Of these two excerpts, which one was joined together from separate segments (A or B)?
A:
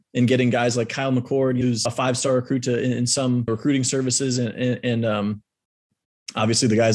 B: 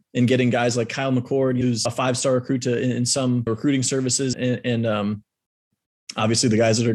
B